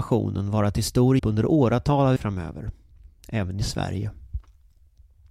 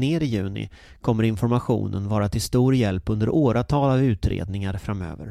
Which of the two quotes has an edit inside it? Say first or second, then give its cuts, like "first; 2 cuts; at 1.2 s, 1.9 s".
first; 2 cuts; at 1.2 s, 2.2 s